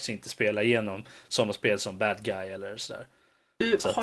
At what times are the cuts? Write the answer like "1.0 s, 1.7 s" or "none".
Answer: none